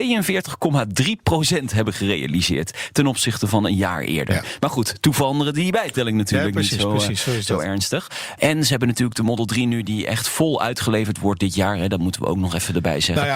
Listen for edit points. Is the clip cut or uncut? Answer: uncut